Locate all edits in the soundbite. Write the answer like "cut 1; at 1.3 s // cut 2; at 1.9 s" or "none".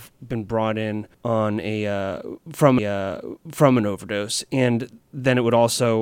cut 1; at 1.1 s // cut 2; at 2.8 s